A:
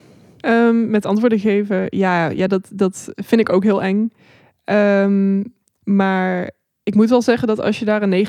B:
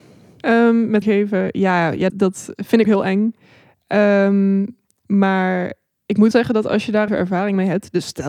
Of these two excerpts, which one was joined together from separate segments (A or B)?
B